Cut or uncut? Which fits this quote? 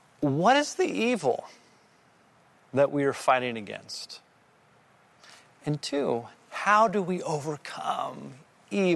uncut